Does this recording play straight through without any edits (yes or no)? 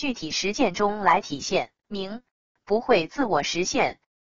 no